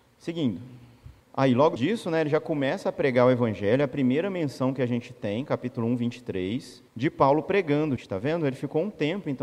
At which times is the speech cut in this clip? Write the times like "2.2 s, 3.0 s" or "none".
1.2 s, 1.8 s, 6.9 s, 8.0 s